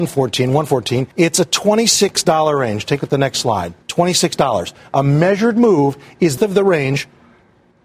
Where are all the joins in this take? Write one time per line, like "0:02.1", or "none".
0:01.1
0:03.0
0:03.8
0:06.4

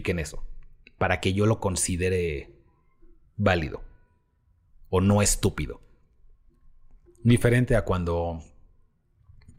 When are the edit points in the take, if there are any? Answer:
0:07.3

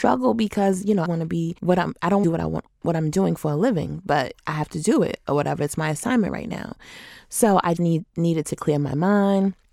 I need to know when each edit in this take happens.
0:01.1
0:01.6
0:02.2
0:07.8

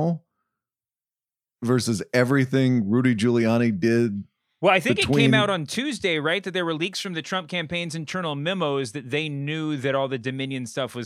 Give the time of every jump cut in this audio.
none

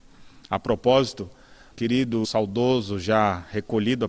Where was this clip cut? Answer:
0:01.7
0:02.2

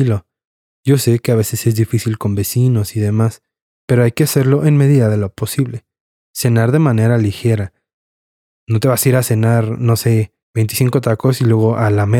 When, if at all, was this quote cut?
0:10.4

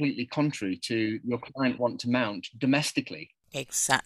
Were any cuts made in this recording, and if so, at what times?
0:01.2
0:01.8

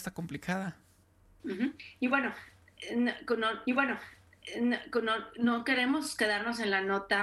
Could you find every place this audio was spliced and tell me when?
0:01.4
0:03.7

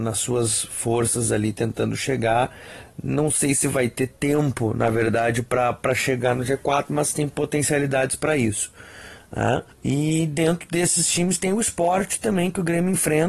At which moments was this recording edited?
0:09.7

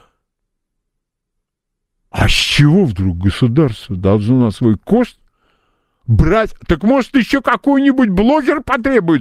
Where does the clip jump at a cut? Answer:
none

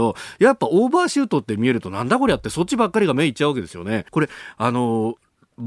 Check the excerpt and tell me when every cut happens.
0:04.1

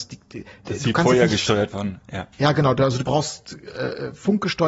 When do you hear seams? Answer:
0:02.3

